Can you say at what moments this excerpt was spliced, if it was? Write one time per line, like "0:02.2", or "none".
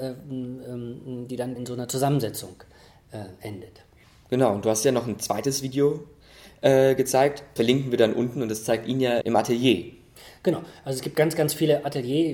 0:01.6
0:04.0
0:07.6
0:09.2